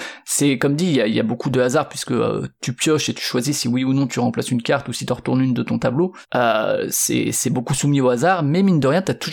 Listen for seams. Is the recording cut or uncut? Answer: uncut